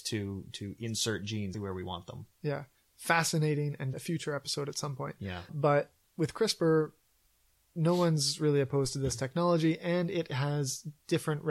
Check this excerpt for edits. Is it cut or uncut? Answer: cut